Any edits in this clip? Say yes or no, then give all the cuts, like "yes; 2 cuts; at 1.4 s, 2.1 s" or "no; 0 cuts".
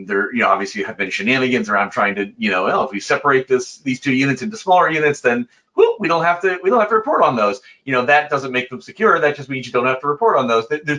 no; 0 cuts